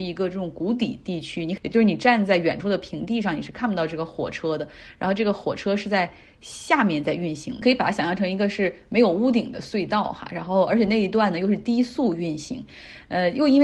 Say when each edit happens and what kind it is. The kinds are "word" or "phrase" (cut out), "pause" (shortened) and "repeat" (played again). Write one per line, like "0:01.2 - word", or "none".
none